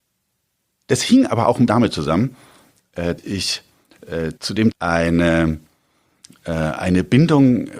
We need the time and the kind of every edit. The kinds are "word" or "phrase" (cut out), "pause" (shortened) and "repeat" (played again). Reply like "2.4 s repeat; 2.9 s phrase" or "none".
1.7 s word; 3.2 s word; 4.4 s pause; 4.7 s word